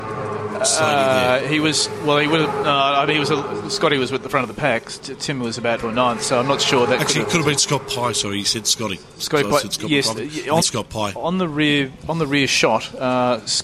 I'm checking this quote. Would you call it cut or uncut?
cut